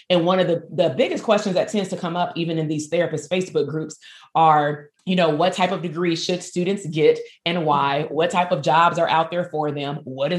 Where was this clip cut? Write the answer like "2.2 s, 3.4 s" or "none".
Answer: 5.0 s